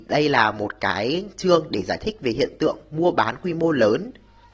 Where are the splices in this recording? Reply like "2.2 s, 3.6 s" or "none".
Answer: none